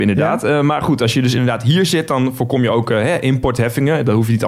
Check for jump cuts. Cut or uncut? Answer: uncut